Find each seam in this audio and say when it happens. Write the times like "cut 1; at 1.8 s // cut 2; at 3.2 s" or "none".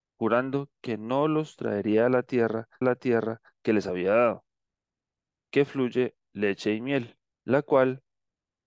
cut 1; at 2.8 s // cut 2; at 7.3 s

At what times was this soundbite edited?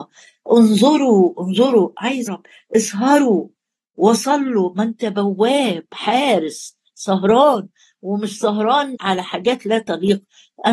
cut 1; at 1.3 s // cut 2; at 2.3 s // cut 3; at 8.9 s

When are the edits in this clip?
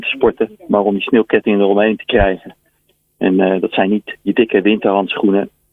none

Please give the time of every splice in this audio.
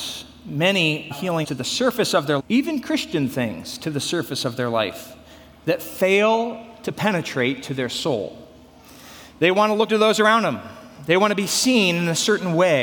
cut 1; at 1.1 s // cut 2; at 1.4 s // cut 3; at 2.4 s // cut 4; at 9.9 s

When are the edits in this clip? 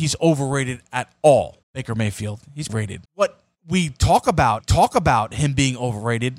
cut 1; at 1.6 s // cut 2; at 2.7 s // cut 3; at 3.1 s // cut 4; at 4.6 s

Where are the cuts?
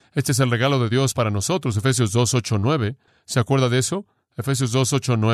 none

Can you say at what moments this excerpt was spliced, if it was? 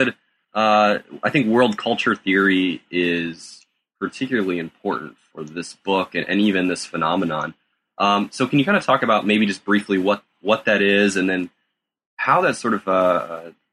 none

